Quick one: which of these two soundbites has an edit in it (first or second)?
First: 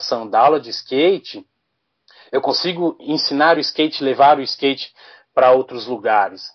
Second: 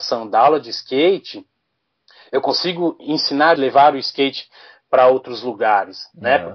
second